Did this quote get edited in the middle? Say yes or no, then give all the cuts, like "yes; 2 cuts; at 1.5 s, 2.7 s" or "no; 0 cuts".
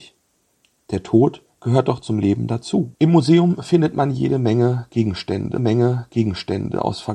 yes; 3 cuts; at 1.5 s, 3.0 s, 5.6 s